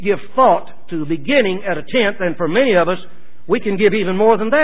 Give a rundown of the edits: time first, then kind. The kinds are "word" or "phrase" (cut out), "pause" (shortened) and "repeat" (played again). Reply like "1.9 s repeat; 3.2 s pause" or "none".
none

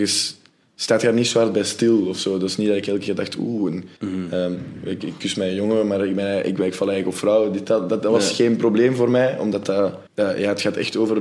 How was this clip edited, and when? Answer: 4.0 s pause; 10.1 s pause

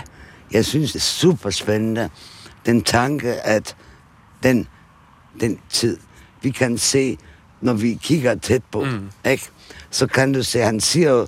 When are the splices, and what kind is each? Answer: 0.9 s word; 5.3 s word; 5.6 s word

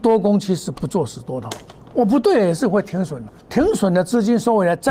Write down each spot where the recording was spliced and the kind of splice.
1.8 s pause; 3.3 s word

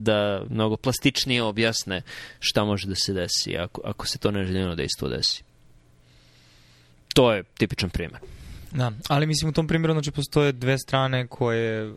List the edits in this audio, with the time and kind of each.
none

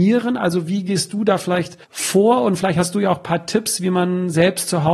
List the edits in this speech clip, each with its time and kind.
1.8 s pause

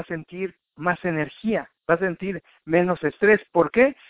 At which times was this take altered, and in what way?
1.8 s pause

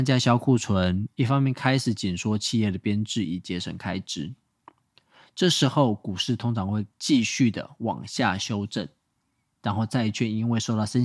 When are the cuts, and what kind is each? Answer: none

